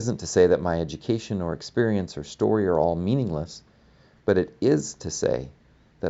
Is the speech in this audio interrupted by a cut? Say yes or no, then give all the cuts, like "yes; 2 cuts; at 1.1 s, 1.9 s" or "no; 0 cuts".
no; 0 cuts